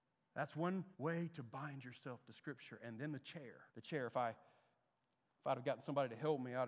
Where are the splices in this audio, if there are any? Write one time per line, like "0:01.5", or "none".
0:00.9
0:03.7

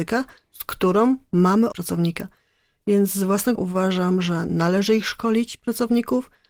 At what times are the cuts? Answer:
0:01.7
0:03.5

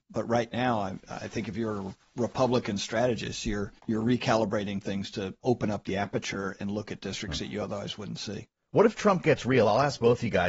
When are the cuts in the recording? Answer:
0:03.8
0:05.4

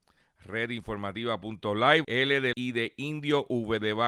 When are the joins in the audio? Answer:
0:02.0
0:02.5

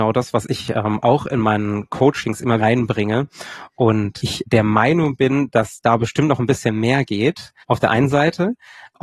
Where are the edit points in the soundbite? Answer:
0:02.6
0:07.6

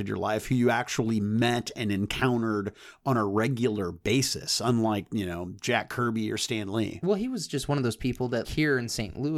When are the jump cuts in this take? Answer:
0:08.4

